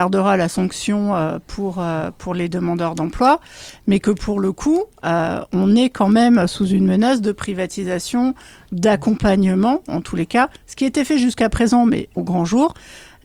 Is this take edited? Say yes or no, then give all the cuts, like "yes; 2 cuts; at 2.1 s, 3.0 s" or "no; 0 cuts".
yes; 2 cuts; at 10.6 s, 12.2 s